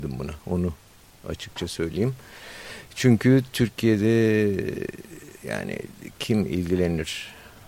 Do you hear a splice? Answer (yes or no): yes